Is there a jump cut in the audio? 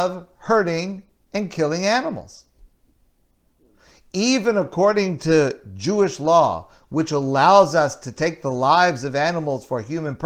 no; 0 cuts

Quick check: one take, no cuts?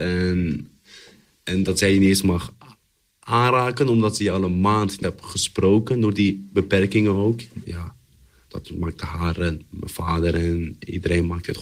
no; 2 cuts; at 5.0 s, 8.6 s

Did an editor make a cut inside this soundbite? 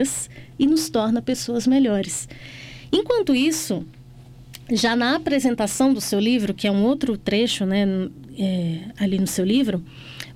no; 0 cuts

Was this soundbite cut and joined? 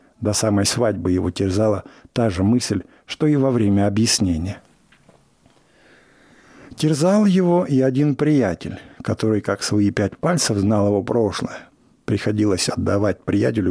no; 0 cuts

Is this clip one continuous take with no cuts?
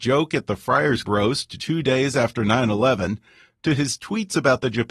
no; 2 cuts; at 1.0 s, 1.6 s

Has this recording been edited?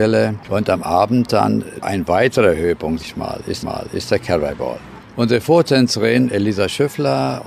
yes; 2 cuts; at 3.0 s, 3.6 s

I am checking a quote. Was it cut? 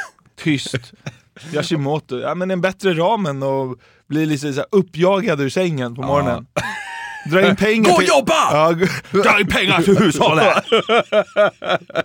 no; 0 cuts

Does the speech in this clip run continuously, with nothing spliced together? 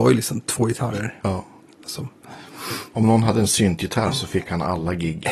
yes; 0 cuts

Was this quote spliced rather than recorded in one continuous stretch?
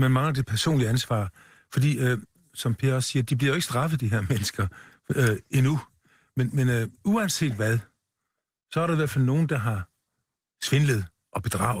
no; 0 cuts

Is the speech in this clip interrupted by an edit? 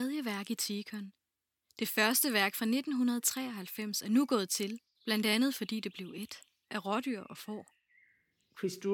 no; 0 cuts

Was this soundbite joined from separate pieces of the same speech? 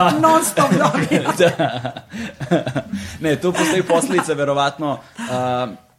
no; 0 cuts

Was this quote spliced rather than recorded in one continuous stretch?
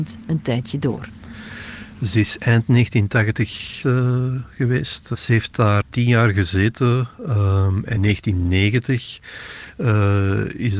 yes; 3 cuts; at 3.8 s, 5.8 s, 8.0 s

